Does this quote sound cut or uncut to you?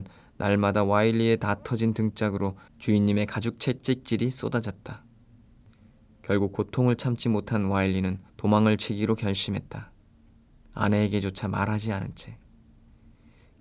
cut